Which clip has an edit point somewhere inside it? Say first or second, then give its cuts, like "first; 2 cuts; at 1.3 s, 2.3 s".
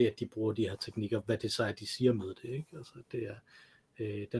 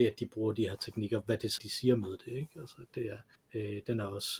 second; 2 cuts; at 1.6 s, 3.3 s